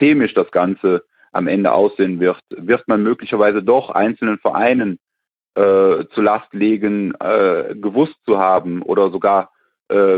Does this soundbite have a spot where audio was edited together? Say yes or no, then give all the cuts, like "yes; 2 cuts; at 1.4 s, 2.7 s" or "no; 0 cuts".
no; 0 cuts